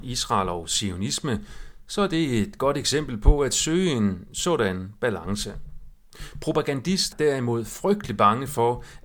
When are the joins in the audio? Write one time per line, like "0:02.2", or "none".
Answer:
0:07.1

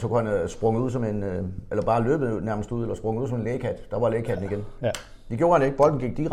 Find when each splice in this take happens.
none

